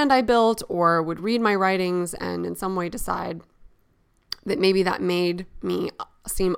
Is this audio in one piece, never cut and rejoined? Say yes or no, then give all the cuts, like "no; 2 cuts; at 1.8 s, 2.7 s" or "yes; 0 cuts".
yes; 0 cuts